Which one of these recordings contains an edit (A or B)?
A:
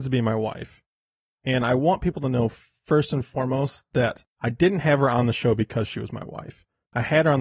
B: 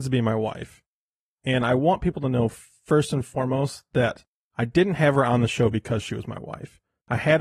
A